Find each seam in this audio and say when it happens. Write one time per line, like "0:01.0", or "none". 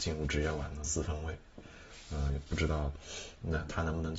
none